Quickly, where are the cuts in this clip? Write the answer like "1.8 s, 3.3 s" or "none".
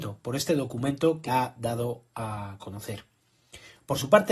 1.3 s